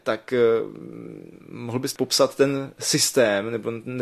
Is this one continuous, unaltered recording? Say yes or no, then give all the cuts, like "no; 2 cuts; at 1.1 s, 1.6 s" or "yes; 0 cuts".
no; 1 cut; at 2.0 s